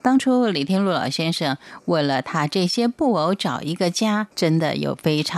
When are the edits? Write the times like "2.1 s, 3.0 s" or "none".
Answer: 4.3 s